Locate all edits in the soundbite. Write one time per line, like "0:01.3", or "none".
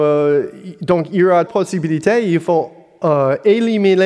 0:01.5